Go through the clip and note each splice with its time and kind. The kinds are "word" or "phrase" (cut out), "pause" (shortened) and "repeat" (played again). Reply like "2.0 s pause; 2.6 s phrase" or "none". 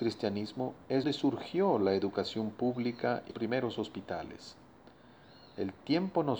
1.0 s word; 3.3 s word